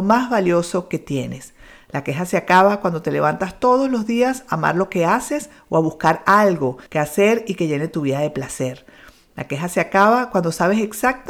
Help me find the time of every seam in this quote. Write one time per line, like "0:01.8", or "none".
0:06.9